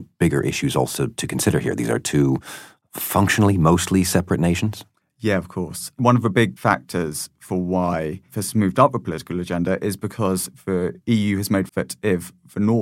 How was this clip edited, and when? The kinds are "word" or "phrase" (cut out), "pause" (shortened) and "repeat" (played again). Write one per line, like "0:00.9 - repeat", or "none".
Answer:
0:05.0 - pause
0:11.7 - phrase